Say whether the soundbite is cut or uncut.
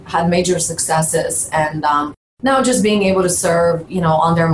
uncut